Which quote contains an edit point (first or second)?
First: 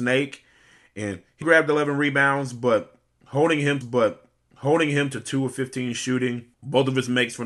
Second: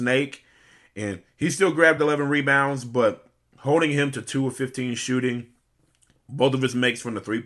first